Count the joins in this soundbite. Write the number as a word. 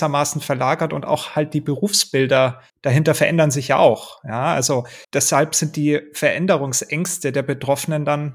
two